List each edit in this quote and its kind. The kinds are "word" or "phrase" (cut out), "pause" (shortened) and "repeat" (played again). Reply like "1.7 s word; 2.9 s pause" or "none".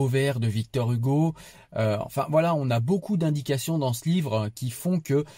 none